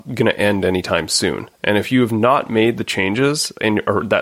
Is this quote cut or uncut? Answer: uncut